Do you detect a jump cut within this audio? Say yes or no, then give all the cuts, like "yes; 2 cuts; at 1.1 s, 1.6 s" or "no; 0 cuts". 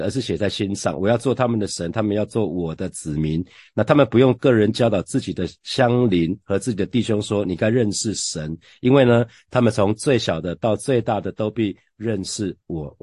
no; 0 cuts